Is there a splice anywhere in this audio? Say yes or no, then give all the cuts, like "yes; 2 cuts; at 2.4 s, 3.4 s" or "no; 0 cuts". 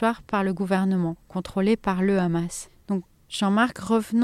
no; 0 cuts